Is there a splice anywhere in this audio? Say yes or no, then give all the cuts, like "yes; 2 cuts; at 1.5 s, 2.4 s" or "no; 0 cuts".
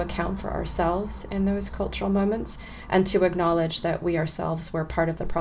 no; 0 cuts